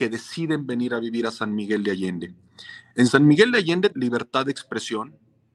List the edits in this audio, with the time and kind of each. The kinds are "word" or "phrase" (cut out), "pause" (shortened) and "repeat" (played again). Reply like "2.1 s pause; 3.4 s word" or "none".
3.9 s word